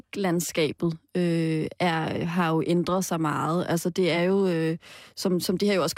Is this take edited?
no; 0 cuts

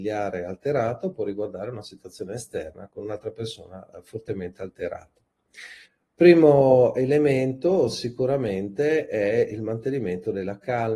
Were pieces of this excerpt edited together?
yes; 1 cut; at 5.8 s

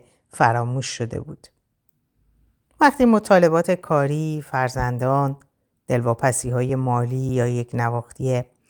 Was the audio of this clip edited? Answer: no; 0 cuts

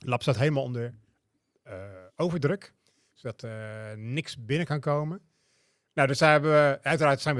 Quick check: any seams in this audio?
no; 0 cuts

